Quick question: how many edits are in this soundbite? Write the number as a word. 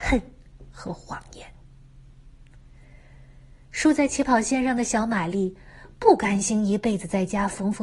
zero